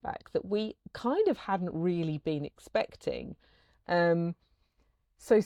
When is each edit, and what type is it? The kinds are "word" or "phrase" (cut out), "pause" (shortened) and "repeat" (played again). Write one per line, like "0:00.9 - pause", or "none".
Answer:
none